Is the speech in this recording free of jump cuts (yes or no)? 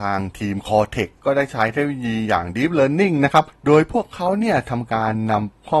yes